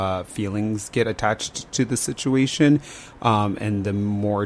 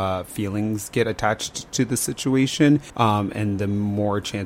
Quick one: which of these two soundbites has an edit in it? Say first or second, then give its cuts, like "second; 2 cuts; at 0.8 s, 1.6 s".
second; 1 cut; at 2.9 s